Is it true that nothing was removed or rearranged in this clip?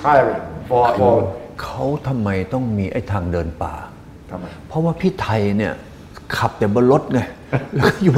no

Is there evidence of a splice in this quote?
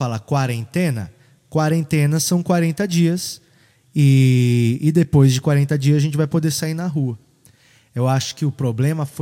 no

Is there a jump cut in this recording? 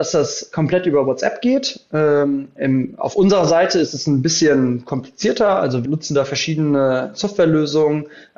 yes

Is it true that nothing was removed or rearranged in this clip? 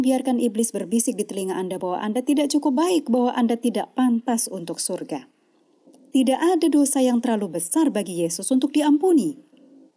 yes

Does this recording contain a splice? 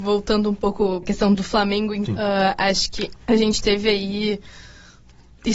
yes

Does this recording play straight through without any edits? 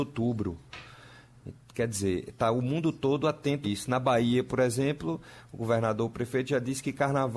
no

